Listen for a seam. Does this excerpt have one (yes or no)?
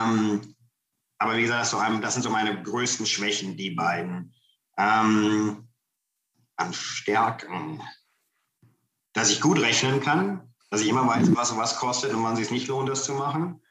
no